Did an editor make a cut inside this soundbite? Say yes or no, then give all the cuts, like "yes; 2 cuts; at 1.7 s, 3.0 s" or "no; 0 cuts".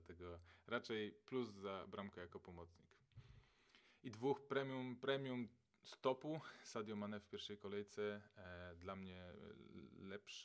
no; 0 cuts